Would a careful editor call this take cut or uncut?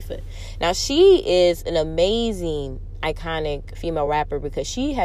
uncut